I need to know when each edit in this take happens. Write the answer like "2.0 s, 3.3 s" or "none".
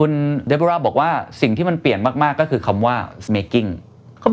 3.3 s

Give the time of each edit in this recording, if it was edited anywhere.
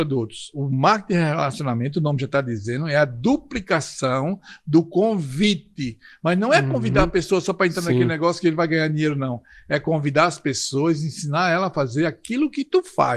none

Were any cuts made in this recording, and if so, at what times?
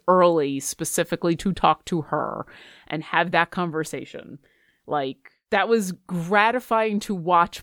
none

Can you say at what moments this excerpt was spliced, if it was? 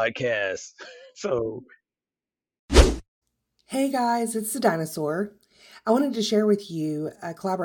3.2 s

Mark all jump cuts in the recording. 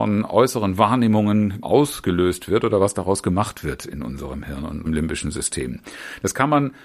1.6 s, 4.9 s

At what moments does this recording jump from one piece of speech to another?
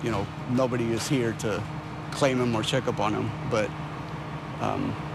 none

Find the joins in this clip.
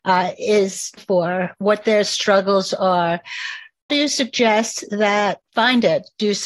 1.0 s, 3.9 s, 5.4 s

